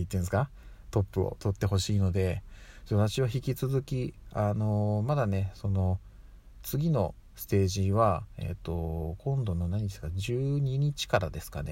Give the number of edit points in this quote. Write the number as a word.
zero